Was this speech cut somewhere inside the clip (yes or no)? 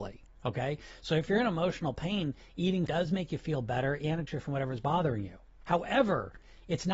yes